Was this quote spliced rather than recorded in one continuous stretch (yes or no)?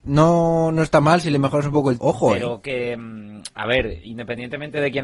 yes